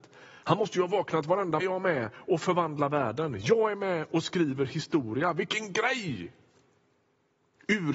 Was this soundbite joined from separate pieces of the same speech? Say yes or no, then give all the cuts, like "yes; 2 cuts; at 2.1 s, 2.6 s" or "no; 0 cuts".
yes; 1 cut; at 1.6 s